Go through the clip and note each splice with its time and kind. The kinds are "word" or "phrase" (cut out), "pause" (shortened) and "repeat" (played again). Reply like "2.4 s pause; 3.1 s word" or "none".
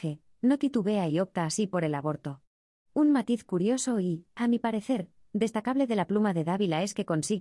none